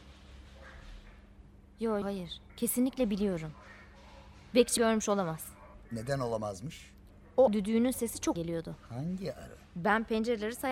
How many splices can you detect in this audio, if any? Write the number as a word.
eight